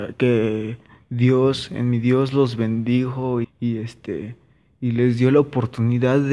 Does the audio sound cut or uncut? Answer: cut